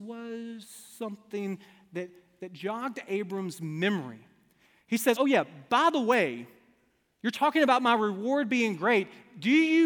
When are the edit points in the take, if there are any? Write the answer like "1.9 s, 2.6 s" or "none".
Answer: 5.2 s